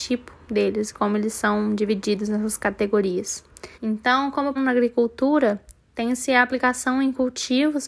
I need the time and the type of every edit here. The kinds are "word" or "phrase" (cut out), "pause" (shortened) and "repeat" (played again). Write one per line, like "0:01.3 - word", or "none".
0:03.7 - pause
0:04.6 - phrase